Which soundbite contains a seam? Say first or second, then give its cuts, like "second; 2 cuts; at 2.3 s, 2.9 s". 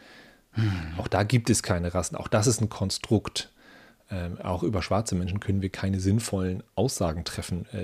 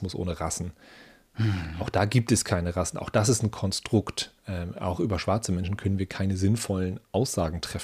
second; 1 cut; at 4.4 s